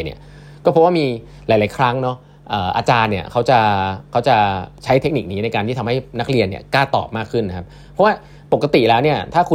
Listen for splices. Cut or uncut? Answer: uncut